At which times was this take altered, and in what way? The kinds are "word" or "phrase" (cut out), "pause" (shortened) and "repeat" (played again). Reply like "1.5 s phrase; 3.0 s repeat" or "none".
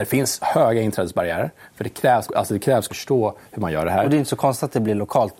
2.3 s word; 2.9 s phrase